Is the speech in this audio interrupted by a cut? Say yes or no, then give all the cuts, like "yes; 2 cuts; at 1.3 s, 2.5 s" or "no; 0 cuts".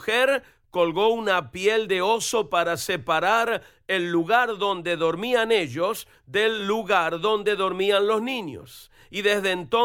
no; 0 cuts